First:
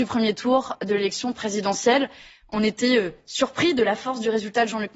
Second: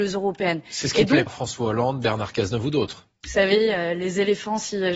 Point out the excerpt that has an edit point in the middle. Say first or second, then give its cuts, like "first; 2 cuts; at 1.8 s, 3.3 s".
second; 1 cut; at 1.3 s